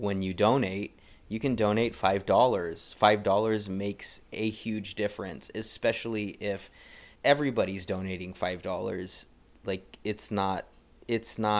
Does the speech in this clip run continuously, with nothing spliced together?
no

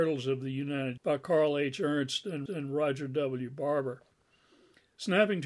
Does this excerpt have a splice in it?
yes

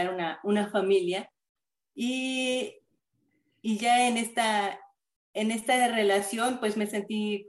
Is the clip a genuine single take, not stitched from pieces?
yes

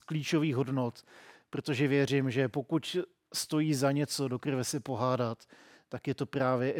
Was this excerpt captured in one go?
yes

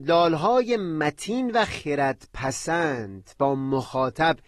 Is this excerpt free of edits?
yes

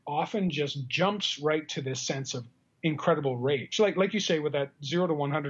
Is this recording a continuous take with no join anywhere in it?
yes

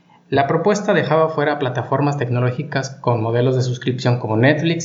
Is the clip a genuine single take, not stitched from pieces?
yes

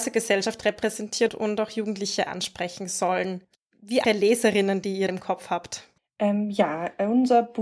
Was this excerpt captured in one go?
no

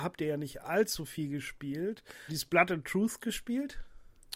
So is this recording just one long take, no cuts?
no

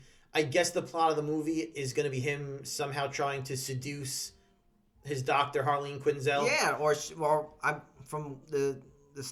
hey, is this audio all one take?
yes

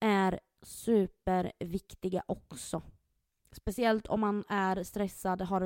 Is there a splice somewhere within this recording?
no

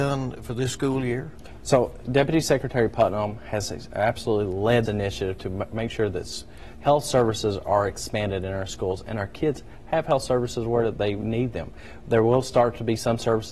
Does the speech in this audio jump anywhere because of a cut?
yes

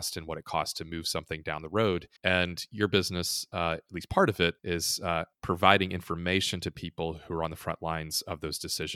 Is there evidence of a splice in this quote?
yes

